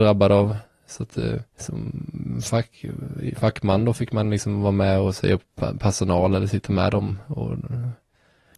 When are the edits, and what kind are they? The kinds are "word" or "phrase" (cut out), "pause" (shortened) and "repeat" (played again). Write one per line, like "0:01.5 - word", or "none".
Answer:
0:01.5 - pause